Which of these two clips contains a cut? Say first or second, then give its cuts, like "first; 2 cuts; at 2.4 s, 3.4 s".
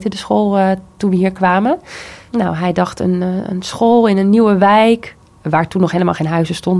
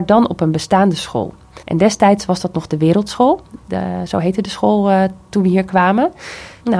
second; 1 cut; at 1.6 s